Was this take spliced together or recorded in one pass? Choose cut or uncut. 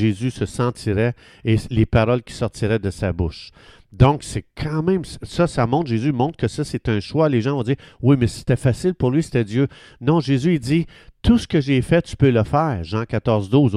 uncut